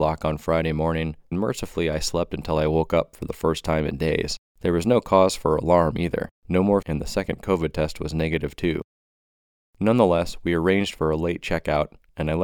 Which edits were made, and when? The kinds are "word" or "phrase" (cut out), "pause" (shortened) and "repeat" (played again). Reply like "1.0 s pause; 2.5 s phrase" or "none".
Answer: 1.3 s word; 4.5 s pause; 6.4 s pause; 6.8 s word